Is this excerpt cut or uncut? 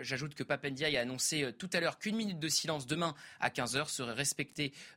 uncut